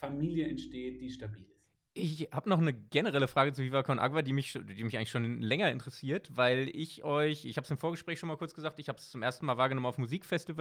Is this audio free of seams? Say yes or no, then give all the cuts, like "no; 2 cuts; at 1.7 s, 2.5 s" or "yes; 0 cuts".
yes; 0 cuts